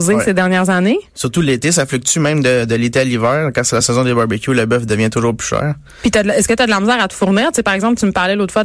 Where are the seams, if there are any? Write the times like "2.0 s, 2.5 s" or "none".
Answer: none